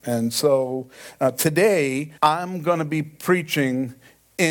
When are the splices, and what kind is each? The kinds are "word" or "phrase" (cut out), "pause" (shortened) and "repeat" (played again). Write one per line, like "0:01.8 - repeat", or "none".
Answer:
0:02.2 - pause